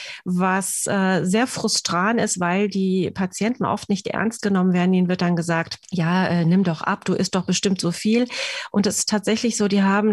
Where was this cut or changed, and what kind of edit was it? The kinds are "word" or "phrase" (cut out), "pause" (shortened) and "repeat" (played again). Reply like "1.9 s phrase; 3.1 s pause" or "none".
5.8 s pause